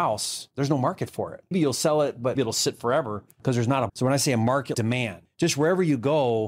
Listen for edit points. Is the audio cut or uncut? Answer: cut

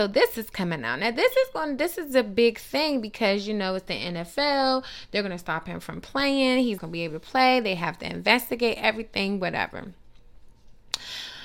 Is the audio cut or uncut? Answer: cut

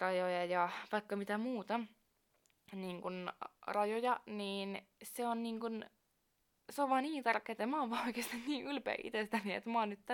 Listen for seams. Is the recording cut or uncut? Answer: uncut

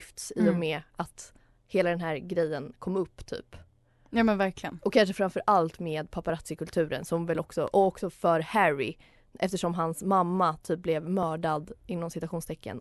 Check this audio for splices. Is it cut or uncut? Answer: uncut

